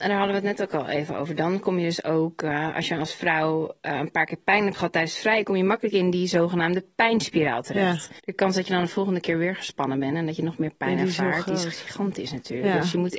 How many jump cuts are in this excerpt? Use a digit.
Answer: 1